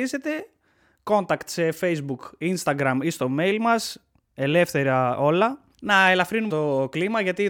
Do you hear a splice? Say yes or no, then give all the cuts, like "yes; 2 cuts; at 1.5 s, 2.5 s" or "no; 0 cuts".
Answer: yes; 2 cuts; at 5.7 s, 6.5 s